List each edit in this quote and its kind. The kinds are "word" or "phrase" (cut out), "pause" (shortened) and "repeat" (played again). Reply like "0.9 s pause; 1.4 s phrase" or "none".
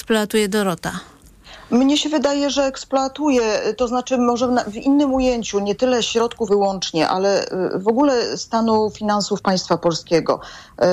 6.5 s word